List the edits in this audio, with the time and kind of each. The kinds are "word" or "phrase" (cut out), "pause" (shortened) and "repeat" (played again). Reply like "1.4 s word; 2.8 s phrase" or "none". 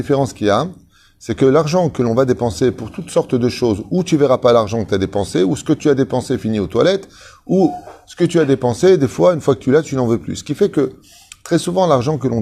none